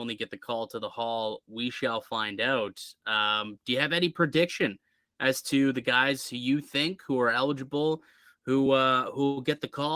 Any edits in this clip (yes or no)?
no